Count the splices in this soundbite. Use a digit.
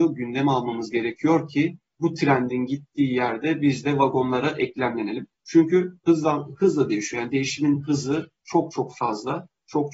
3